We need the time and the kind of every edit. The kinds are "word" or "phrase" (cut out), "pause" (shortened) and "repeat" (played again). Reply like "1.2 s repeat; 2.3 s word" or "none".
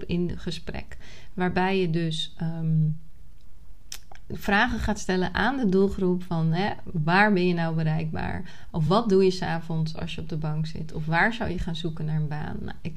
none